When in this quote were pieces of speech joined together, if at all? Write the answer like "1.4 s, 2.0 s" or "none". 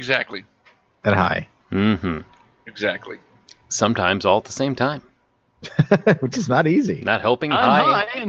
none